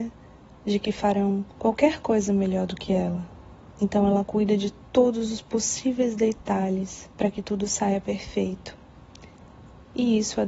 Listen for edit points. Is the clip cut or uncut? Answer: cut